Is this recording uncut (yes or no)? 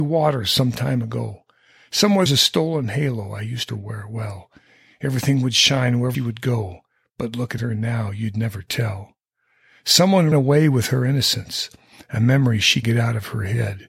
no